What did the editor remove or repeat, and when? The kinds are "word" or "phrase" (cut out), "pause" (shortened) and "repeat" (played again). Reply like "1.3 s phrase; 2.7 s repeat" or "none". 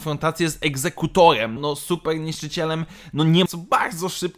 1.6 s word; 3.5 s phrase